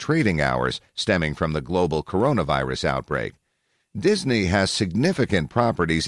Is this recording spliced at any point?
no; 0 cuts

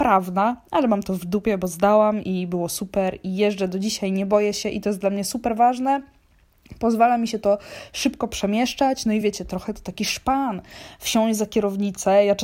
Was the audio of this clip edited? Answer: no; 0 cuts

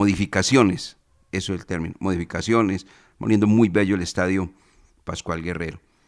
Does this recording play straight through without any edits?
yes; 0 cuts

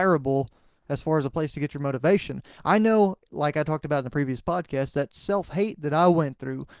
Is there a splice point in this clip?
no; 0 cuts

